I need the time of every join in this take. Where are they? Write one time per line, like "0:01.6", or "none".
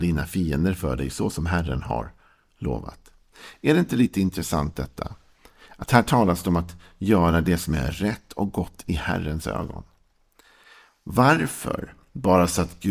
none